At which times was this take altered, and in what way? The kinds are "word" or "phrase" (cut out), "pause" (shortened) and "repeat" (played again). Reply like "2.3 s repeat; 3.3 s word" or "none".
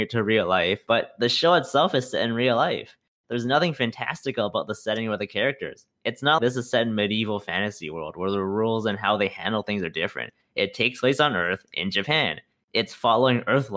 6.4 s word